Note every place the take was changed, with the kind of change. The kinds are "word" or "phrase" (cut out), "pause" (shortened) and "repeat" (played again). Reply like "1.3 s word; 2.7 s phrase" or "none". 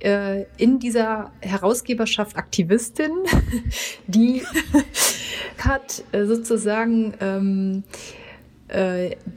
2.3 s word; 4.5 s word; 5.6 s phrase